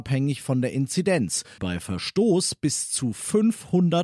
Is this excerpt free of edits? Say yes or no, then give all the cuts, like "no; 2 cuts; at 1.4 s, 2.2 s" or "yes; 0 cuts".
no; 1 cut; at 1.6 s